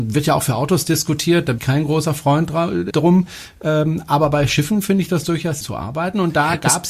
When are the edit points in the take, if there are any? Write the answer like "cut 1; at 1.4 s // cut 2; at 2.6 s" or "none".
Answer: cut 1; at 1.6 s // cut 2; at 2.9 s // cut 3; at 5.6 s